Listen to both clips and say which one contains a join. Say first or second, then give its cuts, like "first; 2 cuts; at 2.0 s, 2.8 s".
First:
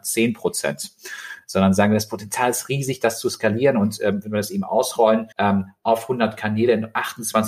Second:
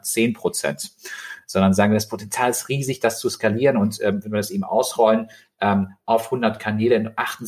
first; 1 cut; at 5.3 s